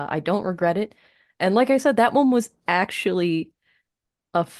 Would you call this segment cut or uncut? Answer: uncut